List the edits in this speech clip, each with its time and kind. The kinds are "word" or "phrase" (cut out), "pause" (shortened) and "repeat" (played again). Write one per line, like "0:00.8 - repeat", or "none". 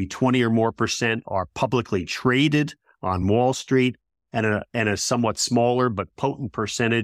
none